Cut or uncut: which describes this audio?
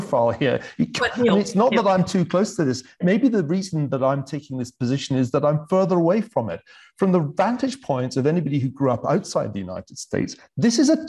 uncut